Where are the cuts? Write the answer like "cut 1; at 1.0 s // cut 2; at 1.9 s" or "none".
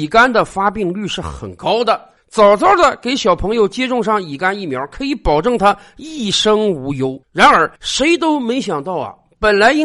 cut 1; at 7.2 s // cut 2; at 7.8 s